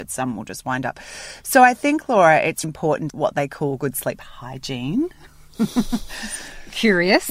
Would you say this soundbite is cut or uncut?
cut